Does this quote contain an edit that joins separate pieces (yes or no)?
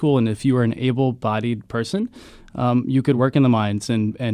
no